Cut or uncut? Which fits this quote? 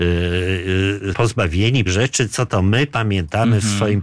cut